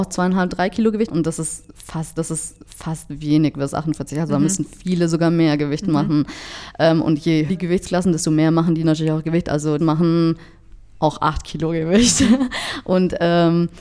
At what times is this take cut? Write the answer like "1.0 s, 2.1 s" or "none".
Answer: 1.1 s, 2.2 s, 7.5 s, 9.8 s